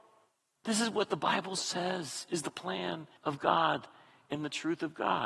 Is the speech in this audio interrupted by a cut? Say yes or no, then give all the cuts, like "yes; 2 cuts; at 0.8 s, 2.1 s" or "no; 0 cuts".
yes; 1 cut; at 3.2 s